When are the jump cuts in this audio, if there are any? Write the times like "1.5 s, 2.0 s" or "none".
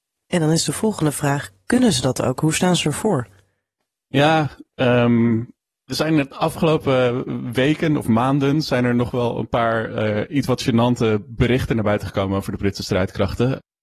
none